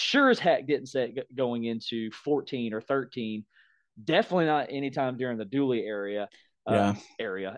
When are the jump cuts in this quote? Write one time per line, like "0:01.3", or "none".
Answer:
none